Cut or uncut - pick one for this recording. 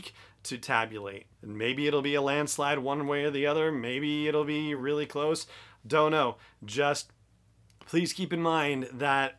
uncut